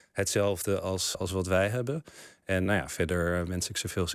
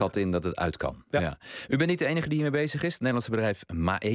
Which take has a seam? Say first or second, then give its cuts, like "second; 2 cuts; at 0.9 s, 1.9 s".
first; 2 cuts; at 1.1 s, 2.7 s